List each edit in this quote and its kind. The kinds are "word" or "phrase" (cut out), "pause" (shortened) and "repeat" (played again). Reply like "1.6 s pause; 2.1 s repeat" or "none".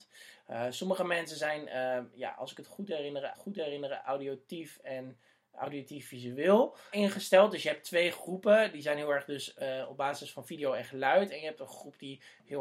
3.3 s repeat; 6.9 s word